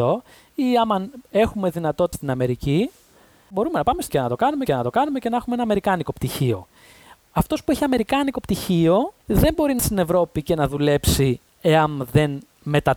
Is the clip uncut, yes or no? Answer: no